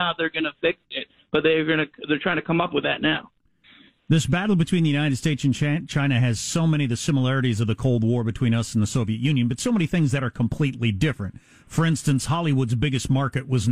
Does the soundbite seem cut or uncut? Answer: uncut